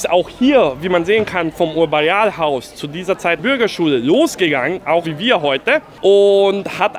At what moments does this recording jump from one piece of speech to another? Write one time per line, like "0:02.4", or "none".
0:03.4
0:05.0